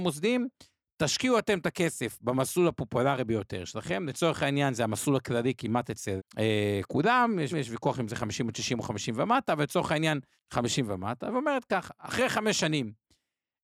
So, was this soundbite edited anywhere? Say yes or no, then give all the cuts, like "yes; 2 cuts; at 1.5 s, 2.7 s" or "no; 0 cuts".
yes; 3 cuts; at 6.2 s, 7.5 s, 10.4 s